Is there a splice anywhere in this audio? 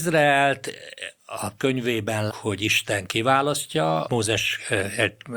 yes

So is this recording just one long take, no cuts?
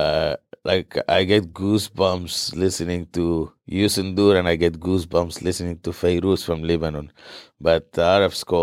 yes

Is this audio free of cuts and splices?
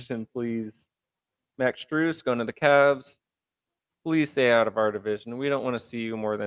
yes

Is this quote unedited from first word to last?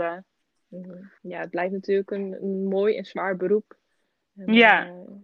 no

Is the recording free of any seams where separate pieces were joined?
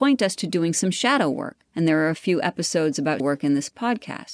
no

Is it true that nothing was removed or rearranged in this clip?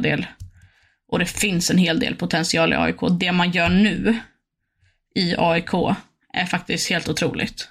yes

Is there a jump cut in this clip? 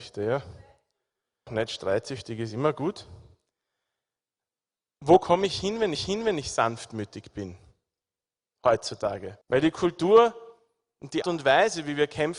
yes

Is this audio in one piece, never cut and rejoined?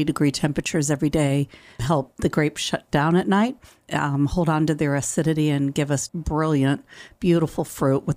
no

